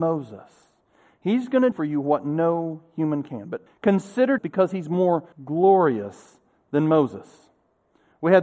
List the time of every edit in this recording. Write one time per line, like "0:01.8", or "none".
0:01.7
0:03.7
0:04.4
0:05.3